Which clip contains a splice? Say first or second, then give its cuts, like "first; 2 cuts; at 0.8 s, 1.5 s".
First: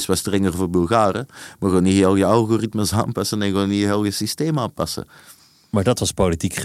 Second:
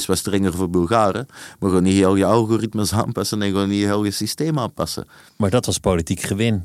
second; 1 cut; at 5.3 s